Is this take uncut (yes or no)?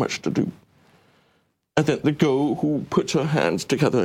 no